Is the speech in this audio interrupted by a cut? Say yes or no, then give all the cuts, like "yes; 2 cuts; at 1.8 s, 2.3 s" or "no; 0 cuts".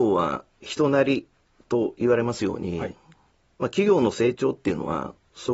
no; 0 cuts